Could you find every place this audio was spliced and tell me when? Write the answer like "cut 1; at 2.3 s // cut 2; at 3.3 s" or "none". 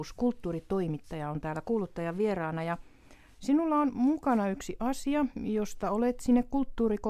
none